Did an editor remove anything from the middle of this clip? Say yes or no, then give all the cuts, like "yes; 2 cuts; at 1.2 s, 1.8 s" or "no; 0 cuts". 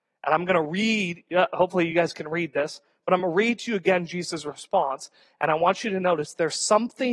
no; 0 cuts